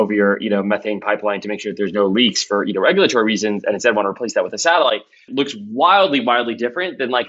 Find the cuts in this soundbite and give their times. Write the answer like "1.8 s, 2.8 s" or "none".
5.3 s